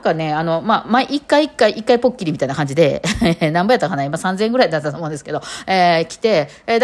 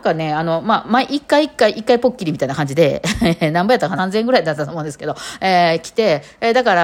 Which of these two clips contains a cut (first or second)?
second